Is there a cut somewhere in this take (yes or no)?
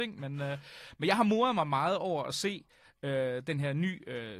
no